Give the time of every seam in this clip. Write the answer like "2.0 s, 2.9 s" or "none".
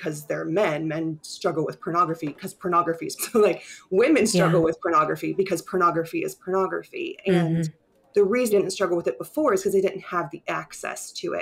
3.2 s, 8.5 s